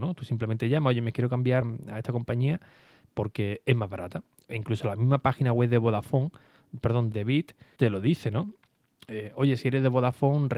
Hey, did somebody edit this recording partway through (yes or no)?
yes